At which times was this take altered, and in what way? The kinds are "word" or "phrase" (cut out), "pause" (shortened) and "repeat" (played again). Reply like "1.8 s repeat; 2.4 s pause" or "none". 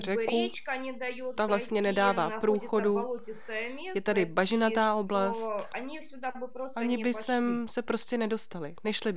none

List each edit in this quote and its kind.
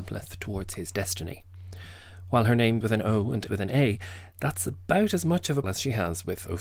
2.8 s word; 3.5 s word; 5.6 s word

